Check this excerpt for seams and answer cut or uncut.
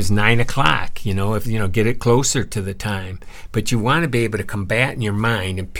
cut